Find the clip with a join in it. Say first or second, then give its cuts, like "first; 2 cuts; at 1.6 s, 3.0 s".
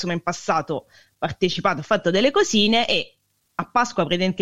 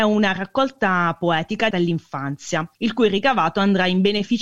second; 2 cuts; at 1.7 s, 2.7 s